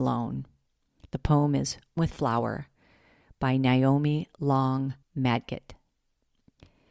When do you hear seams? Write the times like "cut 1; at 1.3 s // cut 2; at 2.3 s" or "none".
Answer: cut 1; at 2.0 s // cut 2; at 5.0 s